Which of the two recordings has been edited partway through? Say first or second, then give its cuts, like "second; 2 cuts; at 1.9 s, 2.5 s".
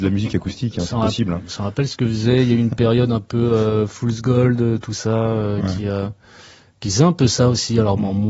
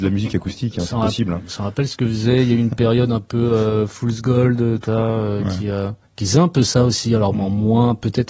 second; 2 cuts; at 4.9 s, 6.0 s